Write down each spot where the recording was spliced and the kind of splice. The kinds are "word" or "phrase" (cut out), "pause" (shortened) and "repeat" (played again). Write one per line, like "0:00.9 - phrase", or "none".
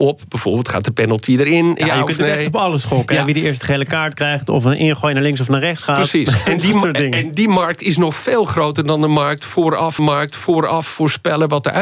0:10.0 - repeat